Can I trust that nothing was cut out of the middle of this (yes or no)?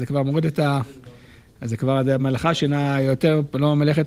yes